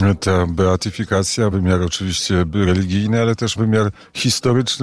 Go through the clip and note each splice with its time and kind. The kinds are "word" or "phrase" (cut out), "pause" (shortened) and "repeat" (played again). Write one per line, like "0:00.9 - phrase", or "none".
0:01.5 - word
0:03.6 - word